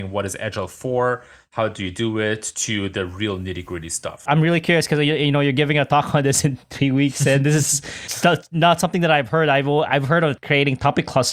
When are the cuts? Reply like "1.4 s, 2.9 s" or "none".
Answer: none